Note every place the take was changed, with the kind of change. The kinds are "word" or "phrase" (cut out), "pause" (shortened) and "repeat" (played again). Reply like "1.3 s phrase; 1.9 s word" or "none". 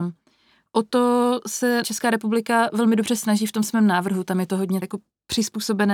1.8 s word; 4.8 s word